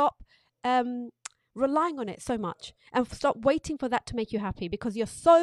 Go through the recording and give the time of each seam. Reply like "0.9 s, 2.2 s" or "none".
none